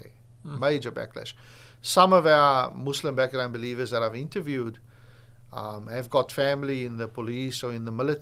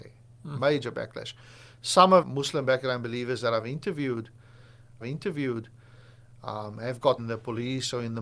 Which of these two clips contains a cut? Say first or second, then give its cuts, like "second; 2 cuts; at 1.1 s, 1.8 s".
second; 3 cuts; at 2.2 s, 5.0 s, 7.2 s